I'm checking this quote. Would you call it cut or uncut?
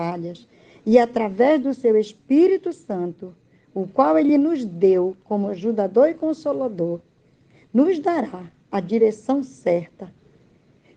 uncut